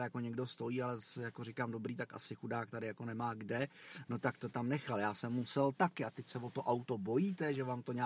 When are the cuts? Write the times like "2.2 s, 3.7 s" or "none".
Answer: none